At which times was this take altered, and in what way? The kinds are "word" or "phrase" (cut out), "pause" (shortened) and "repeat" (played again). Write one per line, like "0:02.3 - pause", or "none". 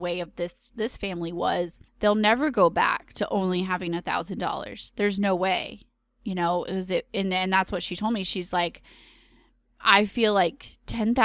0:01.9 - pause